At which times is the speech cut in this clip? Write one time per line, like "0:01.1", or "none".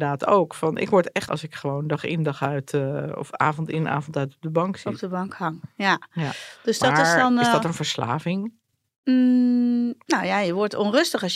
0:01.3
0:08.7